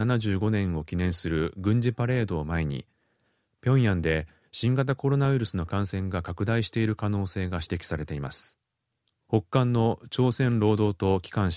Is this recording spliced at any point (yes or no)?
yes